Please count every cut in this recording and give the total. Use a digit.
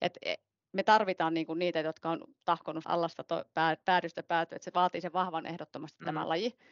2